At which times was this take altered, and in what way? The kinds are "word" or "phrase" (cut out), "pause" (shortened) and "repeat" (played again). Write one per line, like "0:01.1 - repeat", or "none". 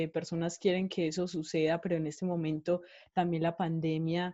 none